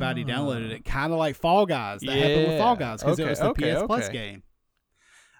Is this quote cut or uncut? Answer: uncut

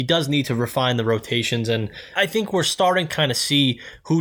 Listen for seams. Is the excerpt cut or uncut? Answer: cut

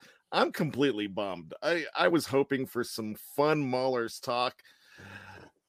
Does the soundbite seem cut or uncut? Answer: uncut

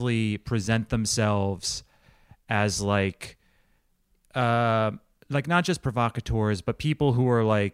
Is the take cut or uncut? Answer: uncut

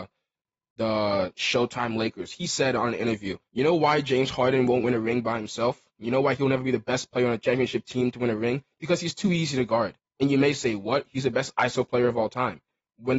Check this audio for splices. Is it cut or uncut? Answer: cut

